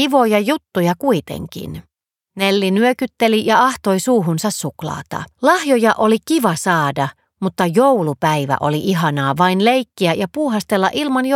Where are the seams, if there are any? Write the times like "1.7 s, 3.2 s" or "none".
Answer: 2.1 s, 5.3 s